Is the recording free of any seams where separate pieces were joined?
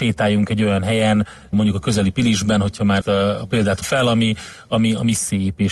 no; 3 cuts; at 1.5 s, 3.0 s, 3.8 s

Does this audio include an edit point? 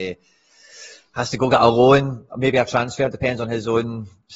no; 0 cuts

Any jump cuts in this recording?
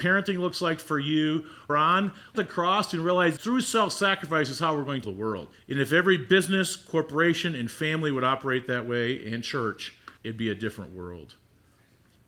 yes; 6 cuts; at 1.7 s, 2.3 s, 3.4 s, 5.0 s, 5.5 s, 10.2 s

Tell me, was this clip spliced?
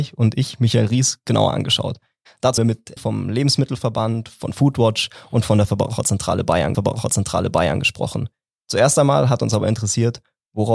yes; 3 cuts; at 2.6 s, 3.0 s, 6.7 s

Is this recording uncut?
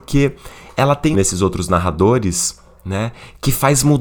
no; 1 cut; at 1.1 s

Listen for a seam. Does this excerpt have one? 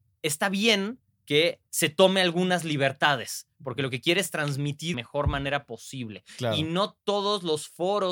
yes; 2 cuts; at 1.7 s, 4.9 s

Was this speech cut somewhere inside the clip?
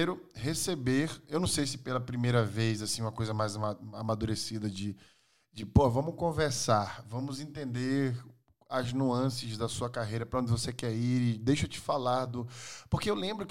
no; 0 cuts

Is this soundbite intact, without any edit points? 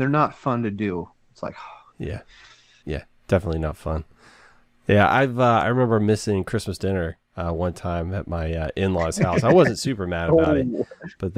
yes; 0 cuts

